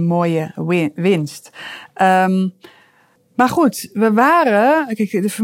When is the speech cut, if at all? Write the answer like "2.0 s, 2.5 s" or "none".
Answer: 3.2 s